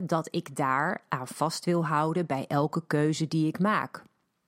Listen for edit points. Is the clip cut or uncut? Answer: uncut